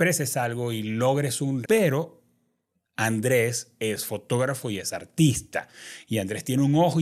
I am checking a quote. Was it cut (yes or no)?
yes